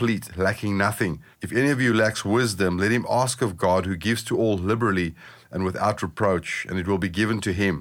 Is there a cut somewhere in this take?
yes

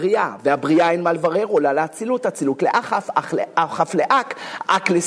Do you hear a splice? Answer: no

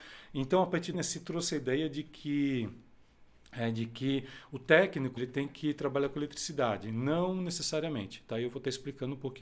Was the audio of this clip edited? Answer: yes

